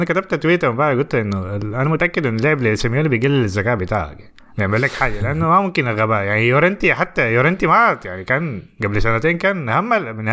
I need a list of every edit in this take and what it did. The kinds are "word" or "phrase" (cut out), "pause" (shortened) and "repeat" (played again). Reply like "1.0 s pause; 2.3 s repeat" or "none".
4.4 s pause

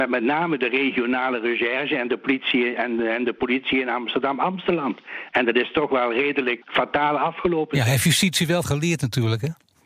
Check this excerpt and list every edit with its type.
6.6 s word; 8.6 s word

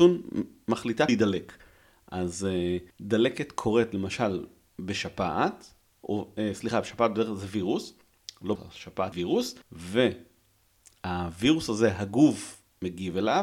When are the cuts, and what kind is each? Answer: 1.1 s word; 2.9 s pause; 6.0 s phrase; 8.5 s word; 9.1 s word; 9.6 s pause

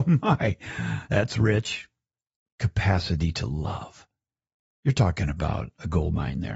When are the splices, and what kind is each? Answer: none

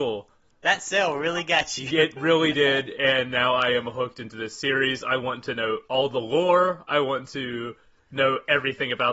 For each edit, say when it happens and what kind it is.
none

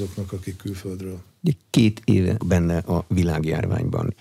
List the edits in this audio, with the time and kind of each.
2.4 s word

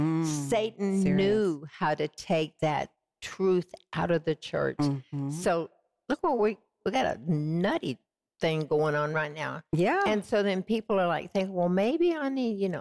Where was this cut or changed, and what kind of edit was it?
none

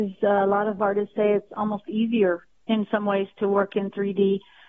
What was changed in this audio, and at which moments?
none

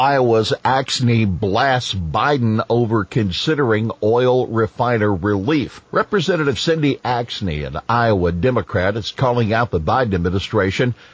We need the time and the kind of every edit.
5.9 s pause

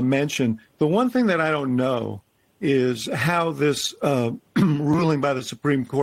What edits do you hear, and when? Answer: none

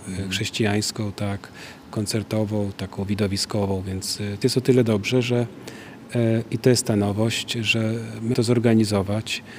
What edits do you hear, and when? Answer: 4.4 s word; 8.3 s word

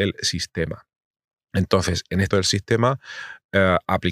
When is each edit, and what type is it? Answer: 2.3 s word

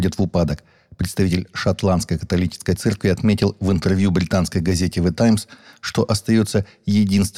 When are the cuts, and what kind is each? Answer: none

